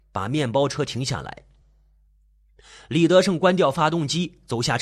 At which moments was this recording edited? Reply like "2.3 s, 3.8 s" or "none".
none